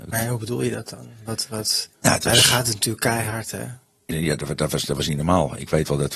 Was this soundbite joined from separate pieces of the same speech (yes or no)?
yes